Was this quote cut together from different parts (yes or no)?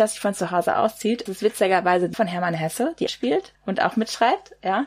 yes